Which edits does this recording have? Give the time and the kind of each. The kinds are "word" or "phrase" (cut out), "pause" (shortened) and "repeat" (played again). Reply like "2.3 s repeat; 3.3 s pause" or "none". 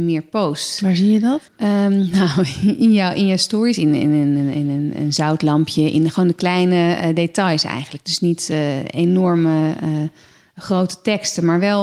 1.5 s pause